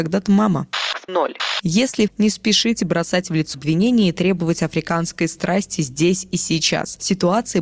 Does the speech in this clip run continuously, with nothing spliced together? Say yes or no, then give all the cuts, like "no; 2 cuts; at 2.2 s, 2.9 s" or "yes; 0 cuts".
no; 3 cuts; at 1.1 s, 2.1 s, 3.5 s